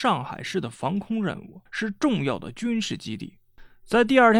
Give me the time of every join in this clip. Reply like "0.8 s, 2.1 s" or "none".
1.7 s